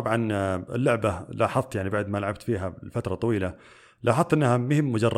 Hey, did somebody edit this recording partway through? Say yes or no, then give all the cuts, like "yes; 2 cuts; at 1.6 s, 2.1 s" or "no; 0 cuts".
no; 0 cuts